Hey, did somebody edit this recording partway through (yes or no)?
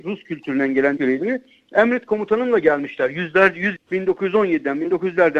yes